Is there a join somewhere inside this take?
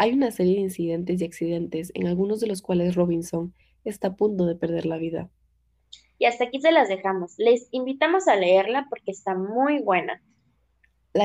no; 0 cuts

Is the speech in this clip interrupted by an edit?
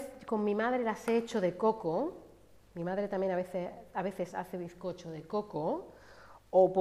no; 0 cuts

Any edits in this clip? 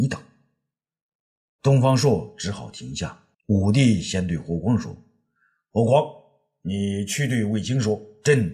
yes; 1 cut; at 3.3 s

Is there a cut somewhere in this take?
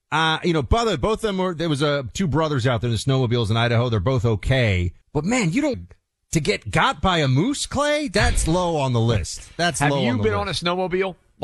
yes; 2 cuts; at 5.0 s, 5.7 s

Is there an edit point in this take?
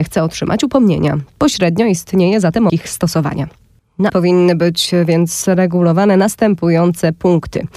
yes; 2 cuts; at 2.7 s, 4.1 s

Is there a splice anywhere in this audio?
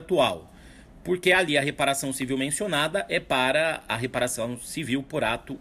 no; 0 cuts

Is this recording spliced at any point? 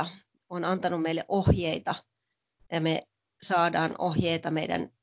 no; 0 cuts

